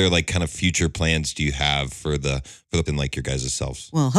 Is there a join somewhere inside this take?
yes; 1 cut; at 2.9 s

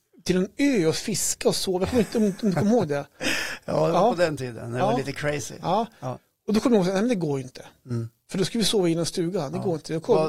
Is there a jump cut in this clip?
no; 0 cuts

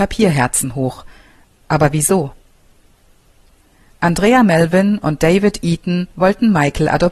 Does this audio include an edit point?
no; 0 cuts

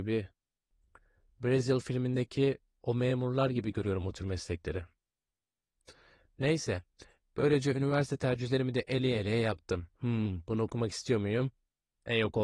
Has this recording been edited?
no; 0 cuts

